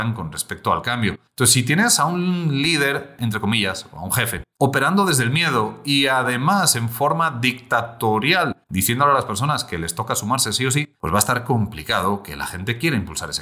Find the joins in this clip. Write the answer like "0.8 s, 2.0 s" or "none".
1.3 s, 8.6 s, 10.9 s